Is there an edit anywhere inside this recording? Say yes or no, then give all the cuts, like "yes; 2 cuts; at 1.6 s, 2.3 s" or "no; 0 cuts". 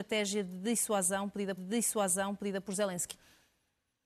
yes; 1 cut; at 1.6 s